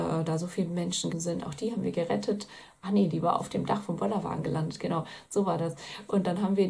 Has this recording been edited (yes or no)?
yes